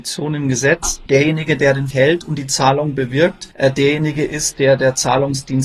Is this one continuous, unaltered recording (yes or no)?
no